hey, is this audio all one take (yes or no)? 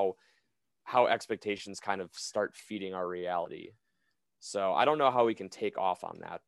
yes